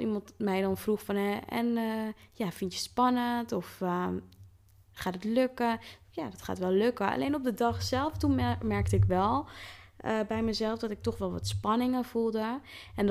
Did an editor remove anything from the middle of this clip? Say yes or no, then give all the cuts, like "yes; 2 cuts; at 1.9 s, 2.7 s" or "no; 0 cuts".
no; 0 cuts